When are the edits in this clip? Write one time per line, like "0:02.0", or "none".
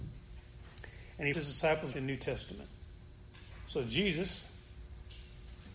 0:01.3
0:01.9